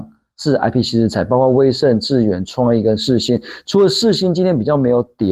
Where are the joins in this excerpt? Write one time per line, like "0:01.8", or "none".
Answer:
none

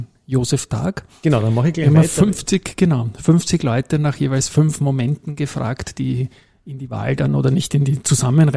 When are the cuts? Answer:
none

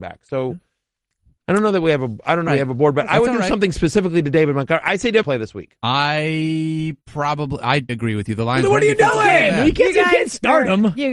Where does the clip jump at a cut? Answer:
0:02.5
0:05.2
0:07.0
0:07.9

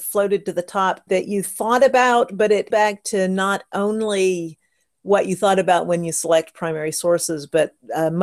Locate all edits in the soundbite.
0:01.1
0:02.7

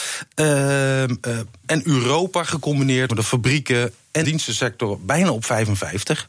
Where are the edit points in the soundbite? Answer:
0:03.1
0:04.2

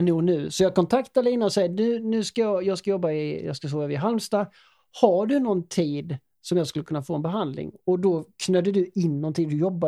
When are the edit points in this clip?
none

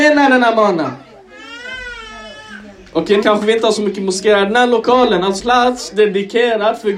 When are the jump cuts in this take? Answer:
0:03.2
0:05.4

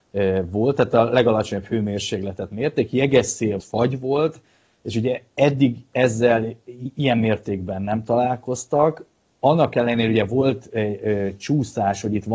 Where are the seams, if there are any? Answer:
0:03.6
0:05.3

